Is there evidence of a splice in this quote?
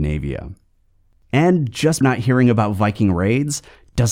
yes; 1 cut; at 2.0 s

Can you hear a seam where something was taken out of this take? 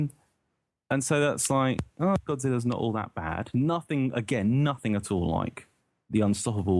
no; 0 cuts

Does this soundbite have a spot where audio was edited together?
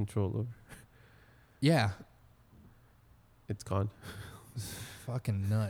no; 0 cuts

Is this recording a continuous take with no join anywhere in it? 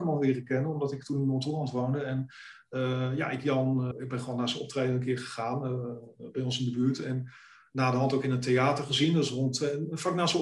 no; 1 cut; at 3.9 s

